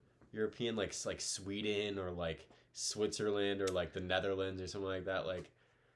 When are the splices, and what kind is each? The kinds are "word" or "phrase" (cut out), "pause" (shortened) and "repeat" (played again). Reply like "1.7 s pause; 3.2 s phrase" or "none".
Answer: none